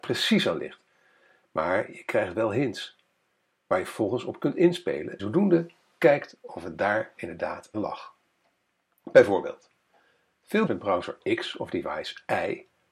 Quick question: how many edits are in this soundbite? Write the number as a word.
three